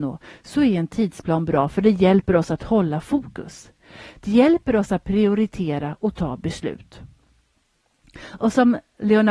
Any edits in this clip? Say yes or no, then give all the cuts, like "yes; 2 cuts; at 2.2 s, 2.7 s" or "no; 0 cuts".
no; 0 cuts